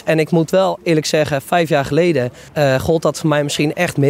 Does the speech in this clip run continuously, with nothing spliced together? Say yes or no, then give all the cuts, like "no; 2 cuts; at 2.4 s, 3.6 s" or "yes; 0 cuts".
no; 1 cut; at 2.5 s